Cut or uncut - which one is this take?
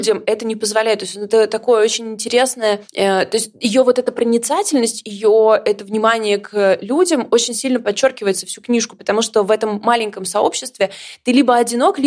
cut